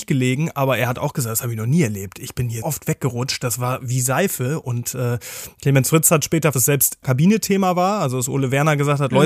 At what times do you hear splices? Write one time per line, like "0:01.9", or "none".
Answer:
0:02.6
0:06.5
0:07.0